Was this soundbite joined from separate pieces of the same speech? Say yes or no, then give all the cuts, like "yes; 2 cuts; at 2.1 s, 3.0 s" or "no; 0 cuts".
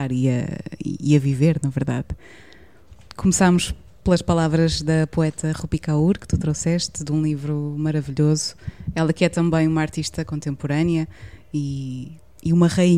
no; 0 cuts